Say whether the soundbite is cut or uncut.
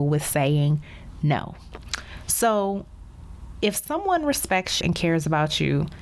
cut